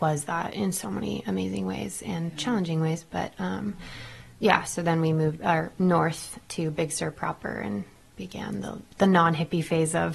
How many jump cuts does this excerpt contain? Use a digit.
1